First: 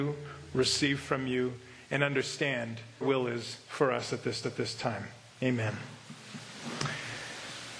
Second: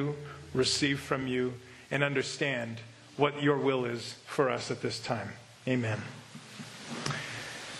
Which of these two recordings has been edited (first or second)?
first